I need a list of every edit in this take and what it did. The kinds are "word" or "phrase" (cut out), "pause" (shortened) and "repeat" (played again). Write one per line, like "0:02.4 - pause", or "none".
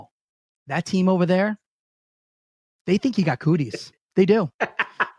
none